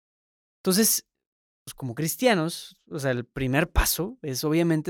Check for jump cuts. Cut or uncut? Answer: uncut